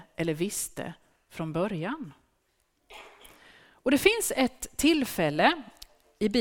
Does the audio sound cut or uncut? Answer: uncut